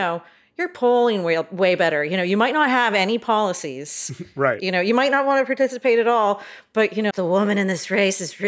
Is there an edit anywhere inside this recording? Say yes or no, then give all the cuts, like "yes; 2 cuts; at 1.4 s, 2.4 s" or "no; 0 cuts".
yes; 1 cut; at 7.1 s